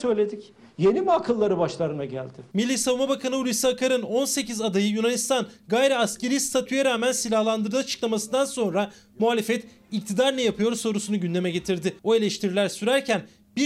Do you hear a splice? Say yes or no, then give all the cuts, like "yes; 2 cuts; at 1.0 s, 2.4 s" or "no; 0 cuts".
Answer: yes; 1 cut; at 12.0 s